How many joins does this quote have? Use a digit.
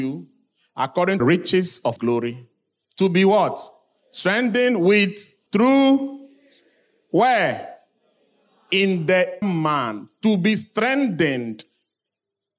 4